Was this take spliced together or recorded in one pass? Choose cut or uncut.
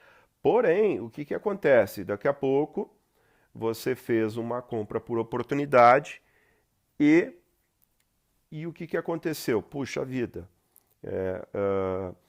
uncut